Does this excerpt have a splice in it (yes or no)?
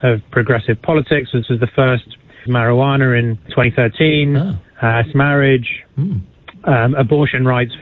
yes